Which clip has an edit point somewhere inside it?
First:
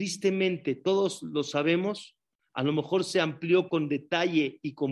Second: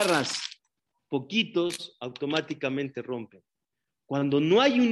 second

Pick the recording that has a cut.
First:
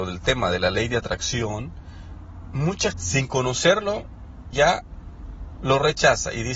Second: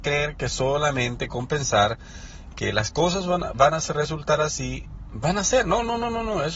first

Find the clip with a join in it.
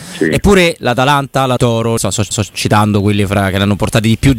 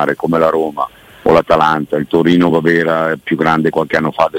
first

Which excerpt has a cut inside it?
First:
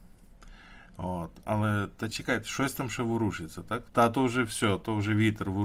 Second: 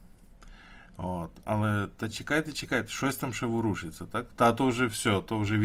first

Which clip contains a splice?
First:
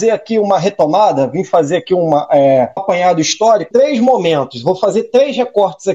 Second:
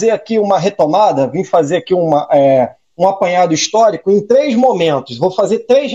first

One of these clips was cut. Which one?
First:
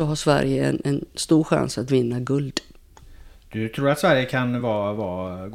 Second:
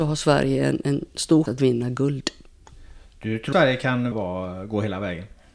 second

